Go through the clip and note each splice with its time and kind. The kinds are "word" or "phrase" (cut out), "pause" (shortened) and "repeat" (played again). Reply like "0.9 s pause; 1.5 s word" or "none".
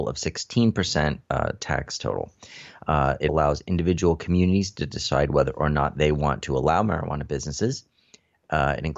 1.2 s pause; 3.3 s word